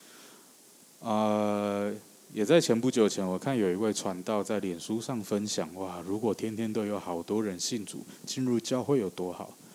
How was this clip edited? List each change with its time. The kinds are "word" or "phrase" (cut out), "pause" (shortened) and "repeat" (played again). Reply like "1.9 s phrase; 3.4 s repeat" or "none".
none